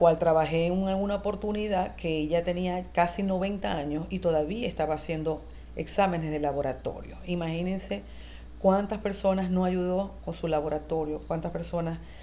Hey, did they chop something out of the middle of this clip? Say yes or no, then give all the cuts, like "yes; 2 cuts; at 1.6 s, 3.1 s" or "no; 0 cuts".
no; 0 cuts